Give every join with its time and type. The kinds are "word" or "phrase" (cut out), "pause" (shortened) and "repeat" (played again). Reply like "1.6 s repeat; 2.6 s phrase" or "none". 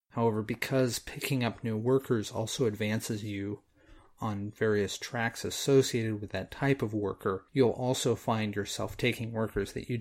7.5 s pause